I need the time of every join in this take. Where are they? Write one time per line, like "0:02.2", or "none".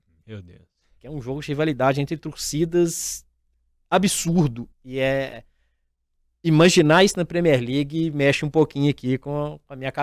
0:04.7